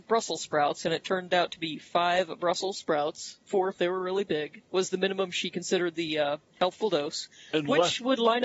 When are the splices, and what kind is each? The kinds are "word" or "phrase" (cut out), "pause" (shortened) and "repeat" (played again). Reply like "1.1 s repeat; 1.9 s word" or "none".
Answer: 4.6 s pause; 6.5 s pause